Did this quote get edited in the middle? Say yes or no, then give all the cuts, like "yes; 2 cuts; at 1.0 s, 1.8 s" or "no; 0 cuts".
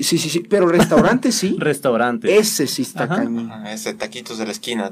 no; 0 cuts